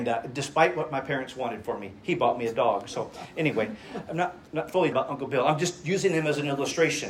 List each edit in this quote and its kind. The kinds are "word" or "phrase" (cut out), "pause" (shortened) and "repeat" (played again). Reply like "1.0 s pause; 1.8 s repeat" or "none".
4.1 s word; 4.5 s pause; 4.9 s phrase

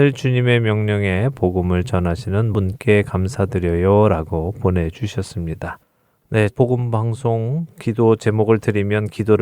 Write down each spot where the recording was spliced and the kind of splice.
2.5 s word; 6.5 s word

